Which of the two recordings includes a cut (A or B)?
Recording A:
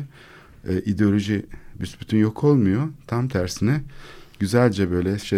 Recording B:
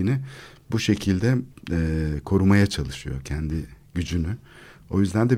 B